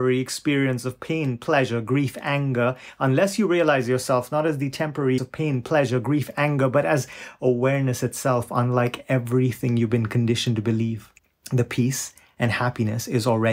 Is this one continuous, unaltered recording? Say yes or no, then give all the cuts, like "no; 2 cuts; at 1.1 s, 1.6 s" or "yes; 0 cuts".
no; 2 cuts; at 5.2 s, 11.2 s